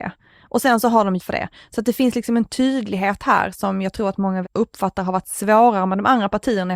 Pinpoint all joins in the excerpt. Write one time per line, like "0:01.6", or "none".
0:01.2
0:04.4